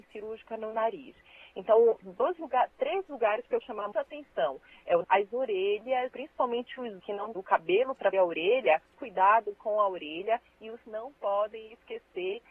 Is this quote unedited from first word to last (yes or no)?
no